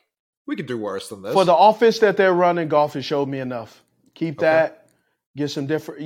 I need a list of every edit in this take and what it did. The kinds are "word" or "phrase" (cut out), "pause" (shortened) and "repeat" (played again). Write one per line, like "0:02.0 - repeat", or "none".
none